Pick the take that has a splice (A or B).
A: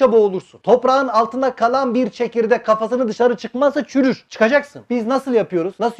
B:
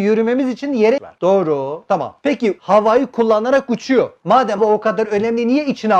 B